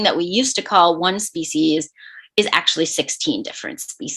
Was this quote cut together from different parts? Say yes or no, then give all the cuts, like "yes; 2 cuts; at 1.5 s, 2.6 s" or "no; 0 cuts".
no; 0 cuts